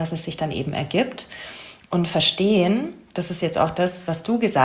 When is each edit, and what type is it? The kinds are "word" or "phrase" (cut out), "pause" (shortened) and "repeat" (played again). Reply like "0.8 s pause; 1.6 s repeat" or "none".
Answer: none